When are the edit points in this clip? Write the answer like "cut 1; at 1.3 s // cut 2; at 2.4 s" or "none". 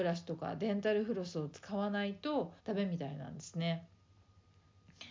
cut 1; at 2.6 s